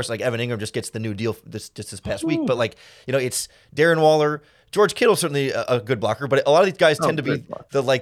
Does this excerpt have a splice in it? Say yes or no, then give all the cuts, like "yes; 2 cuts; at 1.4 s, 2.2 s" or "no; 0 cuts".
no; 0 cuts